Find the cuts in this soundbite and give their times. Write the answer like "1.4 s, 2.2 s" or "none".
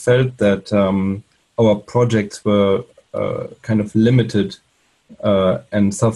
none